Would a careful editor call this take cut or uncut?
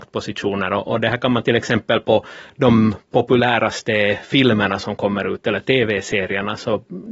cut